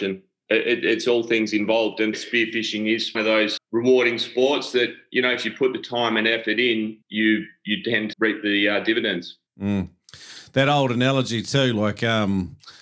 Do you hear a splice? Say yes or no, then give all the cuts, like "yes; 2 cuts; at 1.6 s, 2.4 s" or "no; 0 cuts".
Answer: yes; 6 cuts; at 2.1 s, 3.1 s, 3.6 s, 7.0 s, 8.1 s, 9.5 s